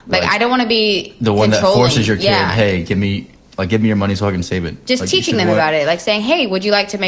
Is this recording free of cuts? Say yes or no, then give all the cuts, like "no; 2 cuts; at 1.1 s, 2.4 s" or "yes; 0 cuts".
yes; 0 cuts